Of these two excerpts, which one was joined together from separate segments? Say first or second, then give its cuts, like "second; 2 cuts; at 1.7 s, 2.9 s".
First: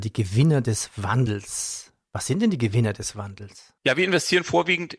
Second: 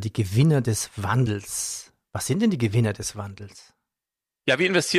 first; 1 cut; at 3.8 s